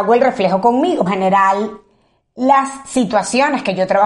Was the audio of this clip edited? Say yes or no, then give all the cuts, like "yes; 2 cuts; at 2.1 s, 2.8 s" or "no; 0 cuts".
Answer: yes; 1 cut; at 1.1 s